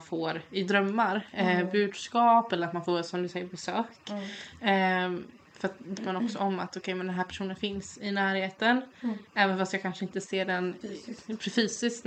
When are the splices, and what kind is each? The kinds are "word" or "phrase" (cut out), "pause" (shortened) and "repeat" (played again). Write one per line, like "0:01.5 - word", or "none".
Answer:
0:06.0 - word
0:10.8 - word